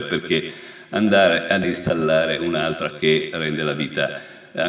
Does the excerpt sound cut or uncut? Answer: cut